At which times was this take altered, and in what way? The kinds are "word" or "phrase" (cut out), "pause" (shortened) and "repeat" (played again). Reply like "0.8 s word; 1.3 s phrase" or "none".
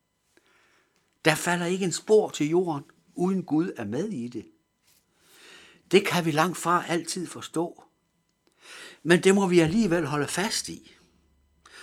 none